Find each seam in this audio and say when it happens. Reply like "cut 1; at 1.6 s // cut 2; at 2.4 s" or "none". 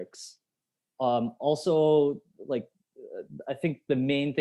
none